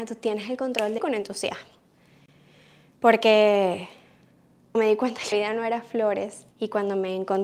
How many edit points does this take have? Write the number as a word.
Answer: four